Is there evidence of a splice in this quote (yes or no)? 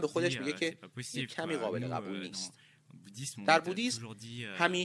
no